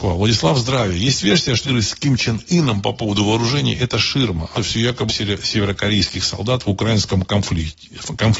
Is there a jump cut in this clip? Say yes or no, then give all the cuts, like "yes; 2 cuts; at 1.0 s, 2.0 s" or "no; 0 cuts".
yes; 3 cuts; at 1.6 s, 4.6 s, 5.1 s